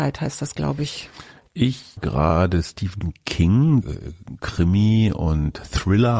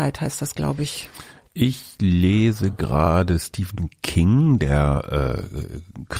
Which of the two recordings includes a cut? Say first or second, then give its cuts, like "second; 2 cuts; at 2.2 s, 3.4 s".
first; 2 cuts; at 2.0 s, 3.8 s